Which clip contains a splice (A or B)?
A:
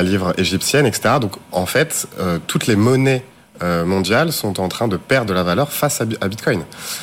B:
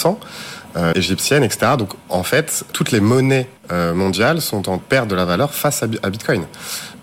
B